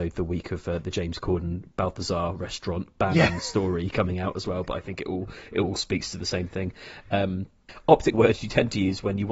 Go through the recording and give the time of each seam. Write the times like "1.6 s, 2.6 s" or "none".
8.1 s